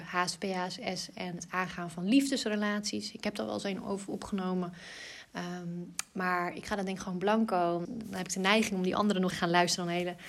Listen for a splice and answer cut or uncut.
cut